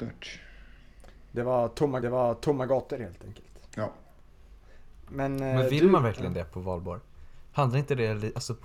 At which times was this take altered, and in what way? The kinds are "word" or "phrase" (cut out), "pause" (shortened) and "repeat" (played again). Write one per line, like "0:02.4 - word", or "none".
0:02.0 - repeat
0:03.7 - pause